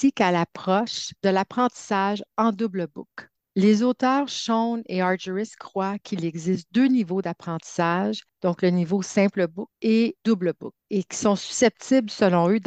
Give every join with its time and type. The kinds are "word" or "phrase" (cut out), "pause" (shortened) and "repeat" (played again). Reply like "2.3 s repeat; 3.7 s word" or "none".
none